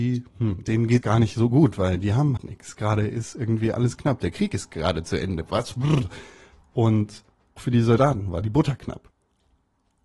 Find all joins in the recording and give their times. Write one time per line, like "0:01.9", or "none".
0:01.0
0:02.4
0:07.6